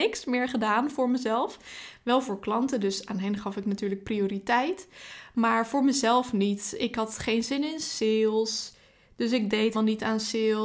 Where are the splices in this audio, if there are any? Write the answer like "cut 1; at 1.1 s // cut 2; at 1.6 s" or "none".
cut 1; at 9.7 s

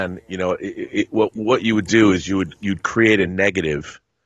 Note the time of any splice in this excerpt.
none

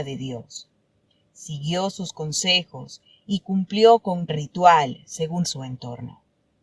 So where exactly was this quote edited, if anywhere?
cut 1; at 4.3 s // cut 2; at 5.4 s

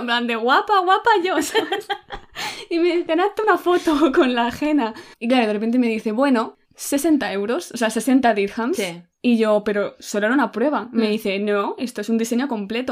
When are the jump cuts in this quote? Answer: cut 1; at 5.1 s // cut 2; at 6.6 s

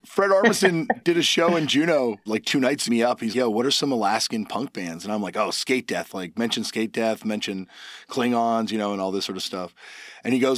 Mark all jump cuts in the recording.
cut 1; at 2.3 s // cut 2; at 2.9 s // cut 3; at 3.3 s

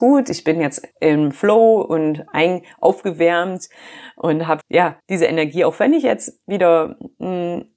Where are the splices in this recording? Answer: cut 1; at 0.9 s // cut 2; at 4.6 s // cut 3; at 5.0 s

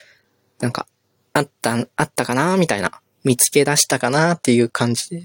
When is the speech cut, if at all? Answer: none

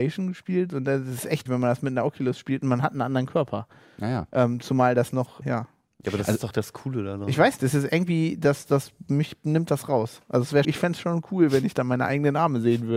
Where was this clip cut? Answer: cut 1; at 1.5 s // cut 2; at 5.4 s // cut 3; at 7.6 s // cut 4; at 10.6 s

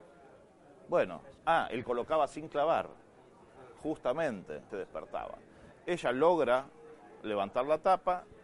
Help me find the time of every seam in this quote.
cut 1; at 1.4 s // cut 2; at 1.8 s // cut 3; at 4.7 s

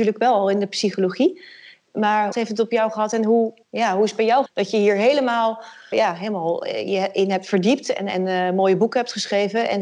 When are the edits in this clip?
cut 1; at 2.3 s // cut 2; at 3.6 s // cut 3; at 4.5 s // cut 4; at 5.9 s

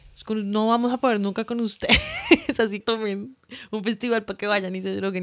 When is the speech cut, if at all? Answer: cut 1; at 2.8 s

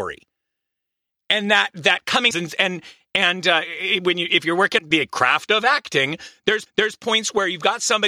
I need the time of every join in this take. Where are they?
cut 1; at 2.3 s // cut 2; at 4.8 s // cut 3; at 6.7 s

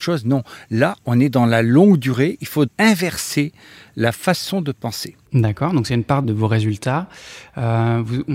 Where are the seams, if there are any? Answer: cut 1; at 2.7 s // cut 2; at 5.2 s // cut 3; at 6.2 s

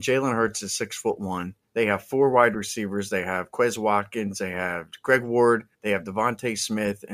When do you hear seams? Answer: cut 1; at 1.6 s // cut 2; at 5.7 s

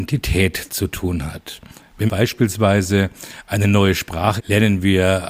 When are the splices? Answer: cut 1; at 2.1 s // cut 2; at 4.4 s

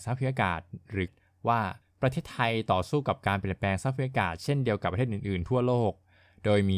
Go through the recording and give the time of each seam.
cut 1; at 1.1 s // cut 2; at 1.8 s

